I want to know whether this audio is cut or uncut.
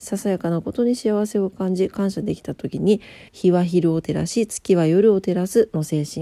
cut